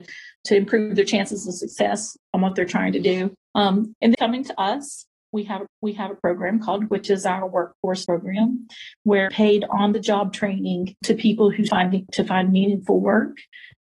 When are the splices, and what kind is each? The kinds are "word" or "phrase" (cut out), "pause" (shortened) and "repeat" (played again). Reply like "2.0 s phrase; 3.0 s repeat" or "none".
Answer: 2.2 s word; 3.4 s pause; 4.1 s word; 5.7 s repeat; 6.9 s word; 8.1 s word; 9.3 s phrase; 11.0 s word; 11.7 s word